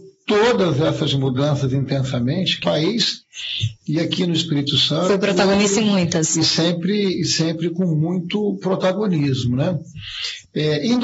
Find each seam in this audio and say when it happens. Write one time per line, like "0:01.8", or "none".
0:02.6